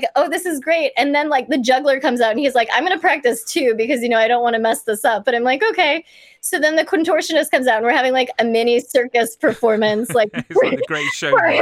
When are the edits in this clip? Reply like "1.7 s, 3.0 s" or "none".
none